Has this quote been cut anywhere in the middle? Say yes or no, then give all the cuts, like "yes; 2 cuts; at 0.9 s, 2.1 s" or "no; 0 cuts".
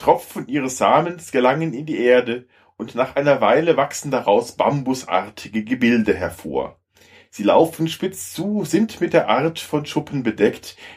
no; 0 cuts